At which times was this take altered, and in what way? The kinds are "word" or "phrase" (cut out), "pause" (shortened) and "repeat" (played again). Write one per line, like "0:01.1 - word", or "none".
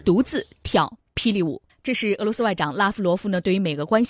0:01.7 - pause